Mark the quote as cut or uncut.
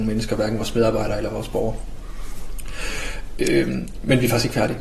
uncut